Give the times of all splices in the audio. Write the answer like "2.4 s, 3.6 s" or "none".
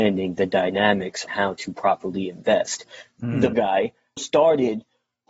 1.3 s, 3.5 s, 4.2 s

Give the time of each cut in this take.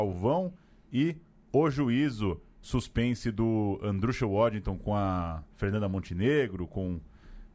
none

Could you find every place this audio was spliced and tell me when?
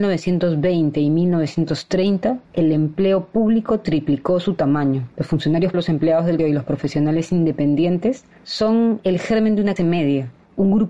2.4 s, 5.1 s, 5.7 s, 6.4 s, 9.8 s

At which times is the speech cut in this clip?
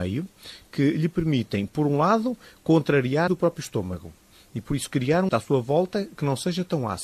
3.3 s, 5.3 s

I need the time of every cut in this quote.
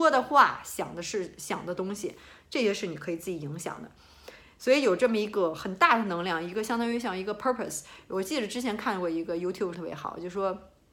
9.7 s

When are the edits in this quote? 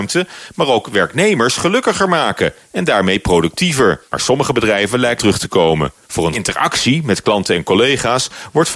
4.1 s, 5.2 s, 6.0 s, 6.3 s

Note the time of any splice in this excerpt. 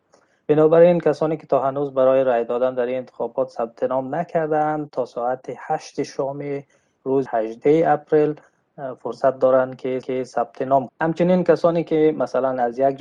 7.3 s, 10.0 s, 10.9 s

